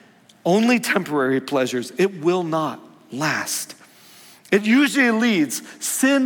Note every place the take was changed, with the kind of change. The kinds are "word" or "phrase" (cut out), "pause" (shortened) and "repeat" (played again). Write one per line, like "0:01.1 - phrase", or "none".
none